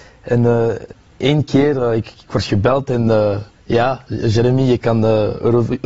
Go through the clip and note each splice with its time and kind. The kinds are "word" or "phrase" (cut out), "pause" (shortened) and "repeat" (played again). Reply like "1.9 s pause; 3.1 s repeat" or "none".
3.5 s pause; 4.8 s phrase